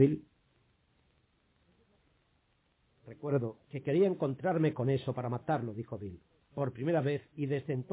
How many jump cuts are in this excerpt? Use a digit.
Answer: 1